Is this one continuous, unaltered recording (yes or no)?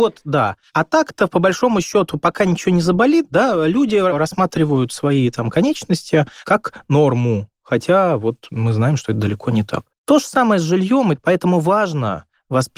yes